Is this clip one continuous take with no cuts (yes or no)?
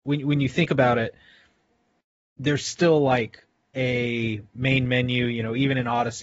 yes